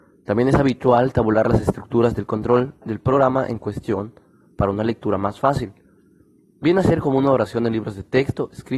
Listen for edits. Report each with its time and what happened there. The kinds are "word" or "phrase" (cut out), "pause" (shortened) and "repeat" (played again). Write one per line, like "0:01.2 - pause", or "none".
none